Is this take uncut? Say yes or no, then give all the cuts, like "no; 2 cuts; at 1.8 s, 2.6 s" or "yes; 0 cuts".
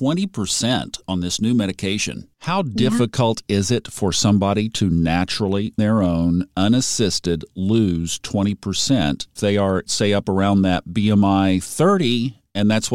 no; 4 cuts; at 2.3 s, 5.8 s, 9.4 s, 9.9 s